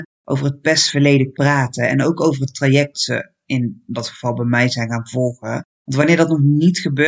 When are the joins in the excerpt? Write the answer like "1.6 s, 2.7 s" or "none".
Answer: 1.3 s, 2.9 s

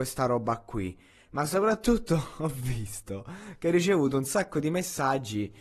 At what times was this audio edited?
none

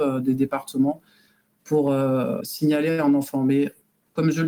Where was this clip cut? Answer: none

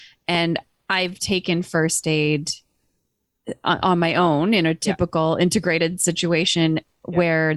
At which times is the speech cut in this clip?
none

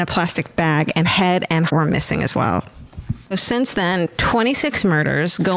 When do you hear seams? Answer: 1.0 s, 1.7 s, 3.3 s

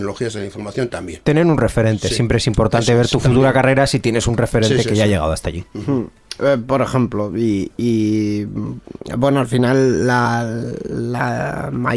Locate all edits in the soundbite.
none

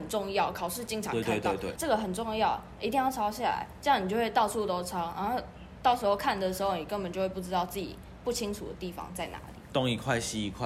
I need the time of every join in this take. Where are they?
1.8 s

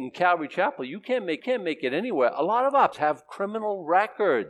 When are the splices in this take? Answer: 1.4 s, 2.9 s

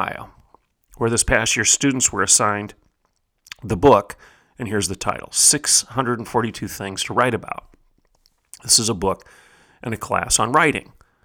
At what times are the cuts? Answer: none

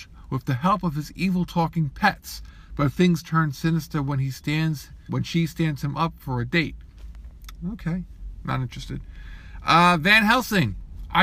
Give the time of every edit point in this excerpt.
5.1 s

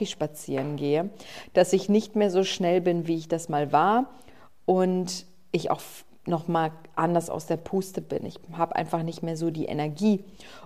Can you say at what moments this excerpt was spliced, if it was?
none

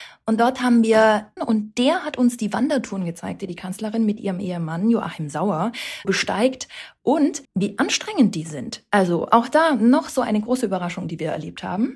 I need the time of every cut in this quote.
1.4 s, 6.0 s, 7.4 s

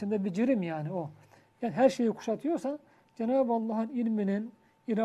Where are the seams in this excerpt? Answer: none

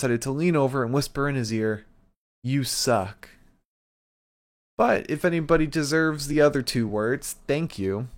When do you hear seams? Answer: none

